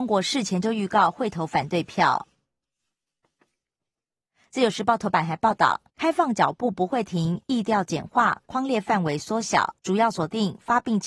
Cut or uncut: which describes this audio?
cut